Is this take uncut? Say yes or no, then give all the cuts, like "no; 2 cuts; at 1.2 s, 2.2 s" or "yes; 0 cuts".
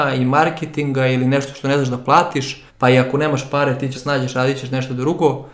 no; 2 cuts; at 2.7 s, 3.9 s